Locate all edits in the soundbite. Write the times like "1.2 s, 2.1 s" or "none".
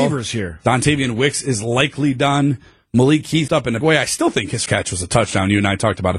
3.5 s, 3.8 s, 4.7 s